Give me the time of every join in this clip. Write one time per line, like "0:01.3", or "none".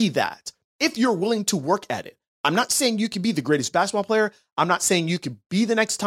none